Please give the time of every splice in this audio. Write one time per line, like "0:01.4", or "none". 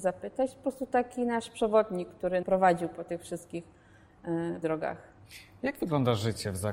0:02.4
0:04.6

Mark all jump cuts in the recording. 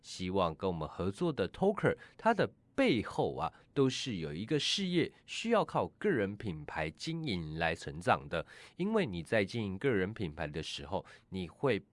0:07.8

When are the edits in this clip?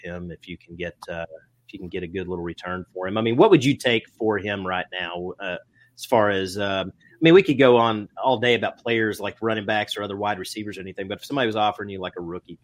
none

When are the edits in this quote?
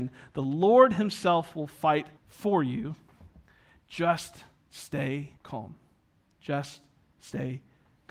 0:02.2
0:05.4

